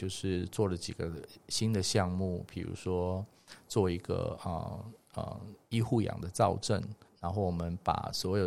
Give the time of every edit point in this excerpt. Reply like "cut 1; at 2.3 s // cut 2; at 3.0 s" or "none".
cut 1; at 7.1 s

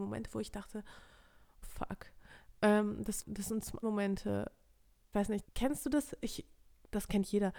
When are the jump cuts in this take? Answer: cut 1; at 1.6 s // cut 2; at 3.2 s // cut 3; at 3.8 s // cut 4; at 5.1 s // cut 5; at 5.4 s

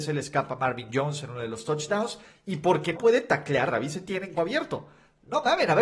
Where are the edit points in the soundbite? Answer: cut 1; at 2.9 s // cut 2; at 3.7 s // cut 3; at 4.4 s

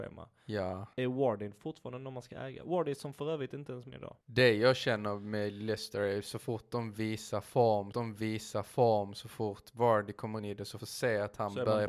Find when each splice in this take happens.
cut 1; at 0.9 s // cut 2; at 3.9 s // cut 3; at 4.2 s // cut 4; at 7.9 s // cut 5; at 10.4 s // cut 6; at 10.8 s

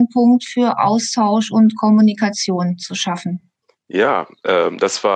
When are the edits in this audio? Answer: none

